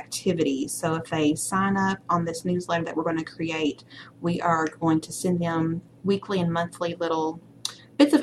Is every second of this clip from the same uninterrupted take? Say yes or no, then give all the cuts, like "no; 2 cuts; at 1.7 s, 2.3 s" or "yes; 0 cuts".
yes; 0 cuts